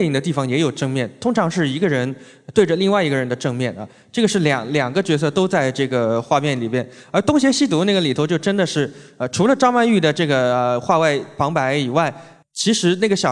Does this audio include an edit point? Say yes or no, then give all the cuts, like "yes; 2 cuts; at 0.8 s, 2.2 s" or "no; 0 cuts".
no; 0 cuts